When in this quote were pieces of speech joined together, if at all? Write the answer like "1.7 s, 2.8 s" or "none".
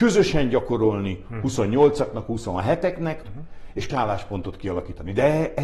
3.2 s, 3.9 s